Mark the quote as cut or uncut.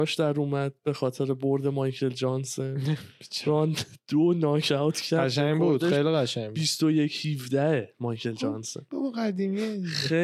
uncut